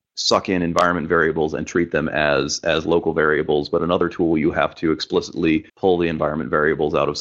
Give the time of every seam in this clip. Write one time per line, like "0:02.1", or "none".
0:05.7